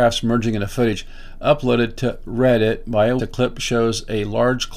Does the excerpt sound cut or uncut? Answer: cut